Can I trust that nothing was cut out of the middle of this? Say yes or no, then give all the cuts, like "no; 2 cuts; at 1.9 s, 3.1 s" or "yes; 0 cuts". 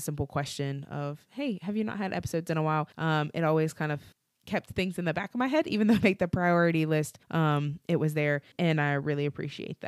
no; 5 cuts; at 2.9 s, 4.1 s, 6.0 s, 7.2 s, 8.5 s